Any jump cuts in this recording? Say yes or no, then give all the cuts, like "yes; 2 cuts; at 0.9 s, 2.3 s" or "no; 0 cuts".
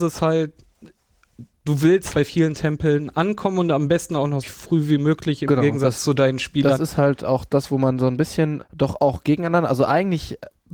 yes; 3 cuts; at 2.1 s, 4.4 s, 8.6 s